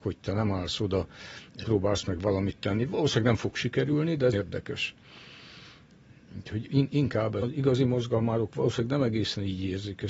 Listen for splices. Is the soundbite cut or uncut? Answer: cut